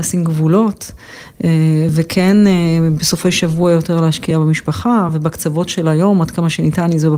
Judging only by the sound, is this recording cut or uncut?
uncut